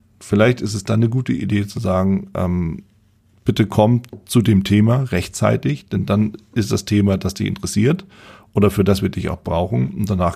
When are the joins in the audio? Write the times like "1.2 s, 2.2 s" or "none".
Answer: none